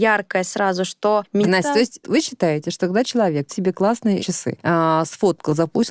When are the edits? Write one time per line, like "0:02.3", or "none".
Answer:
0:01.5
0:02.0
0:03.5
0:04.2